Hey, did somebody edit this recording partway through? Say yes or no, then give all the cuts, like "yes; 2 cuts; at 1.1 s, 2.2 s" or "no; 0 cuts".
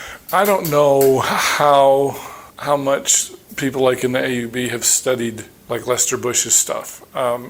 yes; 3 cuts; at 2.5 s, 3.4 s, 5.6 s